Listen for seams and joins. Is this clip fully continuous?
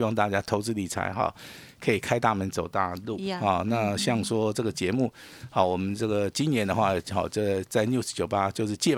yes; 0 cuts

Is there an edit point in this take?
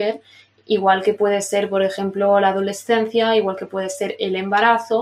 no; 0 cuts

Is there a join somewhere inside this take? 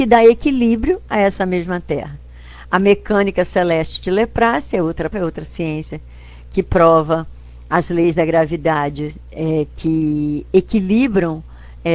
yes; 1 cut; at 5.1 s

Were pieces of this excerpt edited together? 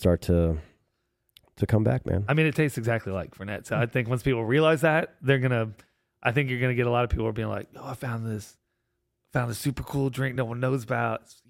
no; 0 cuts

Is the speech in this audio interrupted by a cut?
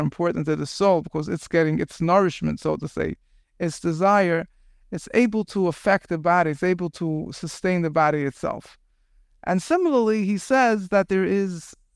no; 0 cuts

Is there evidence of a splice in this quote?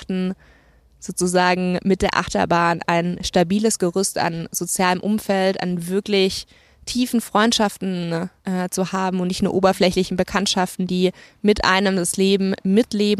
yes; 1 cut; at 8.4 s

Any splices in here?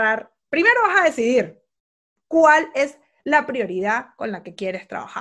no; 0 cuts

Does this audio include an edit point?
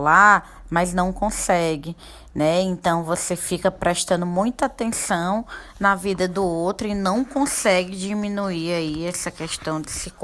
no; 0 cuts

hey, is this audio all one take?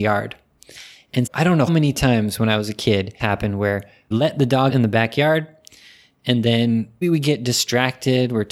no; 6 cuts; at 1.3 s, 1.7 s, 3.2 s, 4.1 s, 4.7 s, 7.0 s

